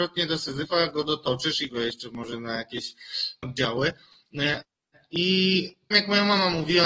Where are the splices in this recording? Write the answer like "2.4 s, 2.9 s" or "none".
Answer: 1.7 s, 3.4 s, 5.9 s